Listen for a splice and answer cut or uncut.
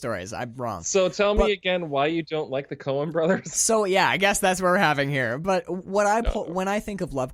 uncut